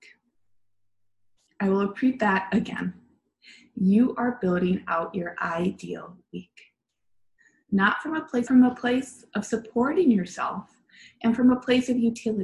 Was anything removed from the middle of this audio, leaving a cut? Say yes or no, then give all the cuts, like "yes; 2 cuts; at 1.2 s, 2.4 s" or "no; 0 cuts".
yes; 1 cut; at 8.5 s